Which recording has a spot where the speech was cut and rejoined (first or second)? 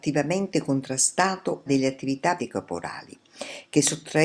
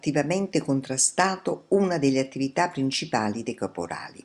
first